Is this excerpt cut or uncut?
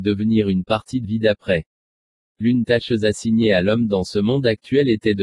cut